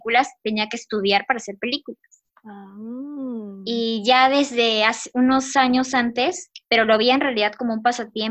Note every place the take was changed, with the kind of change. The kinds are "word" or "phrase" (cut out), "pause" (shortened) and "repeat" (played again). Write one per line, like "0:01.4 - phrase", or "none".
0:02.3 - pause
0:06.6 - pause

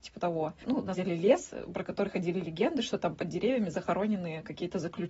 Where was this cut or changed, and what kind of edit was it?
0:01.0 - word

